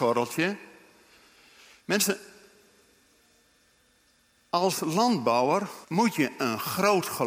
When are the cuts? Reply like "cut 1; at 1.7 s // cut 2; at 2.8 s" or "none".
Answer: cut 1; at 5.8 s